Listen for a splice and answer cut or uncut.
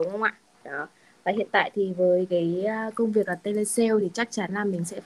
uncut